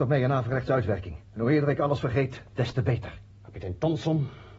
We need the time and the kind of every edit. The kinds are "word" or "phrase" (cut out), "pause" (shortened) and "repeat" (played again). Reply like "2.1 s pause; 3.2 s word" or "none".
1.3 s pause; 2.5 s pause; 3.3 s pause